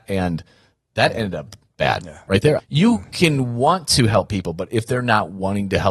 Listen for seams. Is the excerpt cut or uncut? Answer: cut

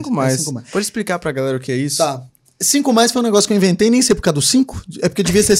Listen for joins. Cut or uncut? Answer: uncut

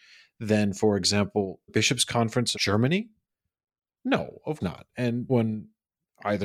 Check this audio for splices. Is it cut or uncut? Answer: cut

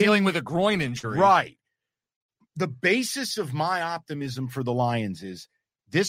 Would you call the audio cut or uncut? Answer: uncut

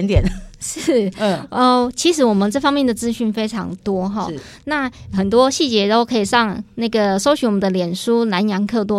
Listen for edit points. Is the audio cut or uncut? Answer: uncut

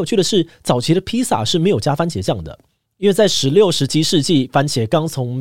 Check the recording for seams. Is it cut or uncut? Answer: uncut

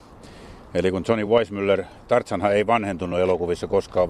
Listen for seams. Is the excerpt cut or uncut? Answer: uncut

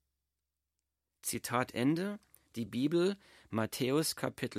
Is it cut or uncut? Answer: uncut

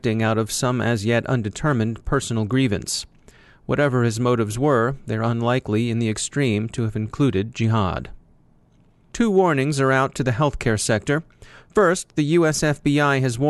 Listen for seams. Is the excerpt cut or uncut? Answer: uncut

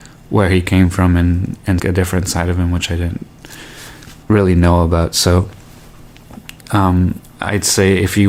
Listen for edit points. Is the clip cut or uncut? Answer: cut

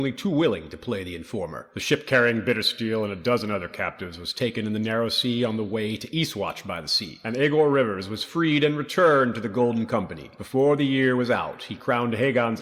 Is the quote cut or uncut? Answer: uncut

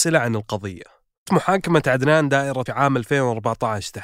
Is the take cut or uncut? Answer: cut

